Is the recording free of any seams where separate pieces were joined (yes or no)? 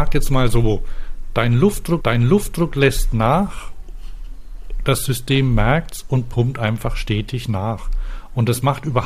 no